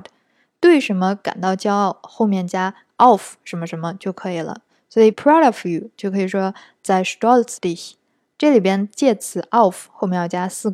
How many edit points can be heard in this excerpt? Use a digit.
2